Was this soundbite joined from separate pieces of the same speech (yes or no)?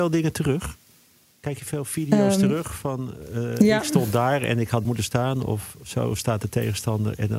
yes